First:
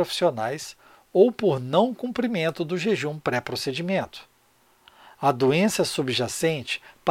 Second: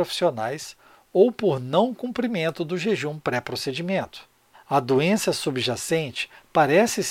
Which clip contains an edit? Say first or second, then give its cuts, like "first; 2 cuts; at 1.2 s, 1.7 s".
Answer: second; 1 cut; at 4.5 s